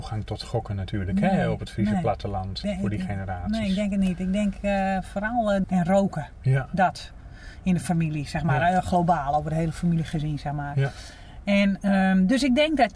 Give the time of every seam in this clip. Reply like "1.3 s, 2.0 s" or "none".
2.6 s, 5.6 s